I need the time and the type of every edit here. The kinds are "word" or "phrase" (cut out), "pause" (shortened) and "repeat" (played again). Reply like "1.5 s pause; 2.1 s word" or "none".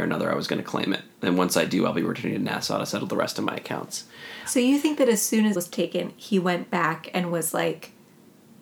5.6 s word